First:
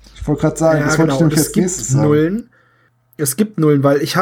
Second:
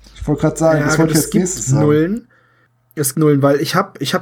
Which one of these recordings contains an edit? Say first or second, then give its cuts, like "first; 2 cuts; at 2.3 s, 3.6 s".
second; 2 cuts; at 1.1 s, 3.1 s